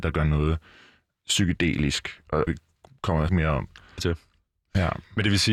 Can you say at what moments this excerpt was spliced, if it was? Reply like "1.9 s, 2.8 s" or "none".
2.5 s, 3.3 s, 4.0 s